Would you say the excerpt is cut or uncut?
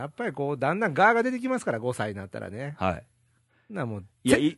uncut